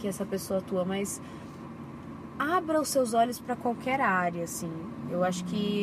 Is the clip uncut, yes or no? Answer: yes